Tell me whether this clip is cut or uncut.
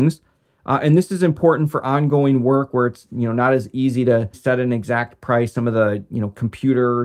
cut